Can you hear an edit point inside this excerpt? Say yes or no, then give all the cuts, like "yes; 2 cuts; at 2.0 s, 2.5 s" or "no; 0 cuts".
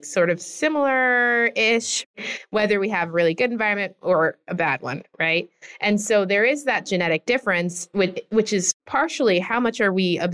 no; 0 cuts